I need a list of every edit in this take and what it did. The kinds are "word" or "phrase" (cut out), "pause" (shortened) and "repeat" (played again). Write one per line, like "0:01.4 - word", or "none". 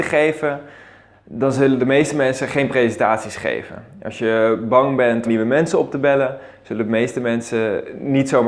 0:05.2 - phrase